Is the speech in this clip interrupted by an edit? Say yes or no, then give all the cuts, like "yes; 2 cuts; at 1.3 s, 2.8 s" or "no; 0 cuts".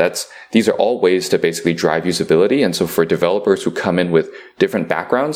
no; 0 cuts